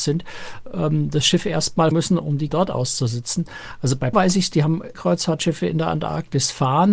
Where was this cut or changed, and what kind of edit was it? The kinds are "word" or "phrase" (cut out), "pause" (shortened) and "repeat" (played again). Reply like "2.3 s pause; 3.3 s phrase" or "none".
1.9 s phrase; 2.5 s word; 4.1 s word; 4.9 s phrase